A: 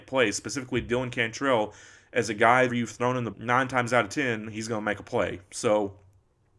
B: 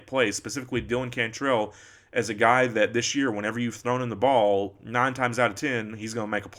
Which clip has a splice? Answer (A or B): A